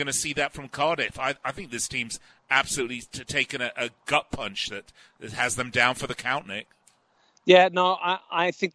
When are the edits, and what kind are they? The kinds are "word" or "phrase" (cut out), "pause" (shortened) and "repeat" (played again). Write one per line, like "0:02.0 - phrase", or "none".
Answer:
none